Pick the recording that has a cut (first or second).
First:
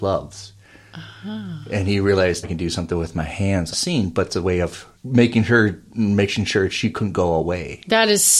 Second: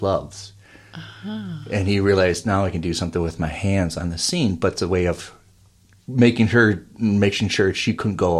first